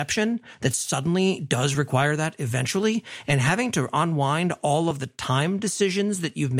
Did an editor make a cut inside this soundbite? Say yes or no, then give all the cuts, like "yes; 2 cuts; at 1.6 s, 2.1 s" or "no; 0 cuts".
no; 0 cuts